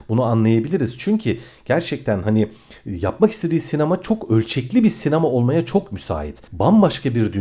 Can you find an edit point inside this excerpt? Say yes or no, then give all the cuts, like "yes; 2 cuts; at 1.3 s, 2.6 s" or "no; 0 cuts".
no; 0 cuts